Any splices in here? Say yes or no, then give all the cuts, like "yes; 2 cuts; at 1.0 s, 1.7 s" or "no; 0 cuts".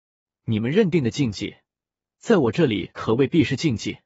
no; 0 cuts